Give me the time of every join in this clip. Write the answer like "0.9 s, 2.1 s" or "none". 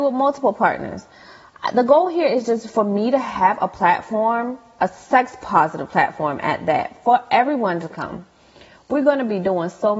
none